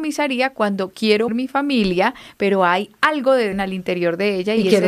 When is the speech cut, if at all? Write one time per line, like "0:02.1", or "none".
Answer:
0:01.3
0:03.5